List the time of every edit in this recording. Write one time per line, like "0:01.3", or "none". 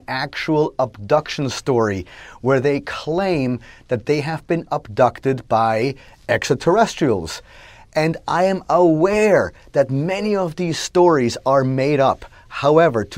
none